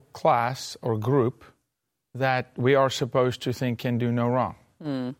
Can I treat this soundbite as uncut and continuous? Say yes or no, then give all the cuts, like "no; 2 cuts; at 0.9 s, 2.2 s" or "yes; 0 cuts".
yes; 0 cuts